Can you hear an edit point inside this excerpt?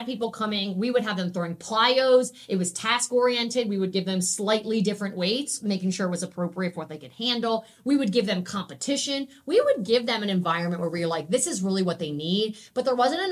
no; 0 cuts

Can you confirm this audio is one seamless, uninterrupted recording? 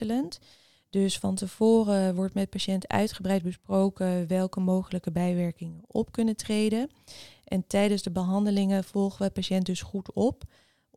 yes; 0 cuts

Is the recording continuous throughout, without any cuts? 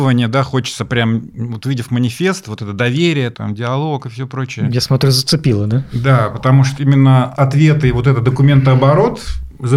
no; 1 cut; at 6.8 s

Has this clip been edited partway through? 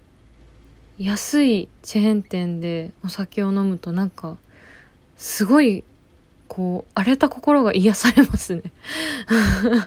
yes; 1 cut; at 1.8 s

